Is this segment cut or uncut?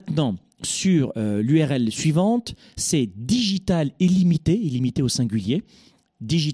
uncut